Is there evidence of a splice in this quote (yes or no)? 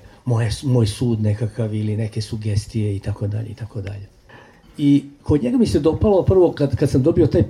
no